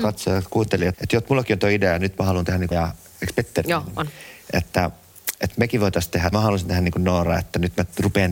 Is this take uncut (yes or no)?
no